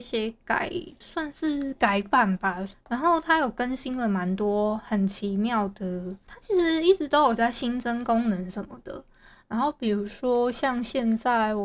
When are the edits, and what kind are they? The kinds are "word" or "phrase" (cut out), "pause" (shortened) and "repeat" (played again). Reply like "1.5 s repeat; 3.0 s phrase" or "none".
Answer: none